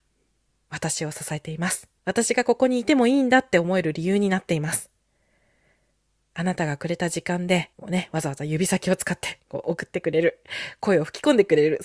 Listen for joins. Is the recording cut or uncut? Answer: cut